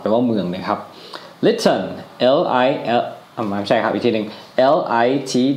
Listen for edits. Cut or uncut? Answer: uncut